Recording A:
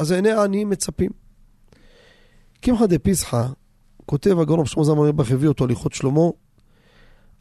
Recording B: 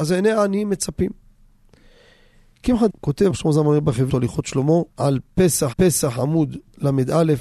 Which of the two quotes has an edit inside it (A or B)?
B